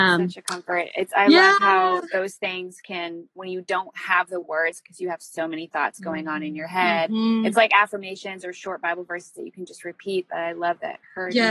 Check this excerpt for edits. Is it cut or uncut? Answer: uncut